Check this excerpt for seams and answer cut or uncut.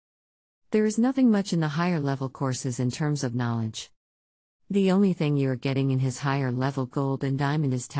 uncut